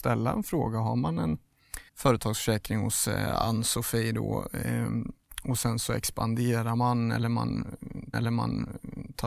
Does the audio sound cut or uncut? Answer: cut